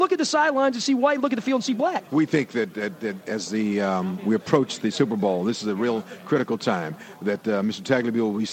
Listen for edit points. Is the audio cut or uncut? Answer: cut